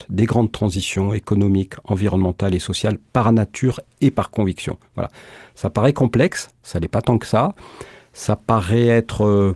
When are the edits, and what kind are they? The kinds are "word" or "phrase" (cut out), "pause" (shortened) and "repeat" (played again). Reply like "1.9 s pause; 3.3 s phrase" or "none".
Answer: none